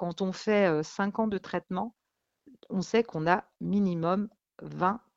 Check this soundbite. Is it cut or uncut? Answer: uncut